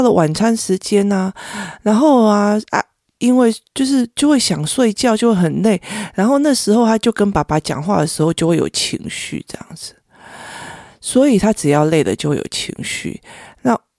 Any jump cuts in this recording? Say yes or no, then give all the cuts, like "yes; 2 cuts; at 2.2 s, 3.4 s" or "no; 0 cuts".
no; 0 cuts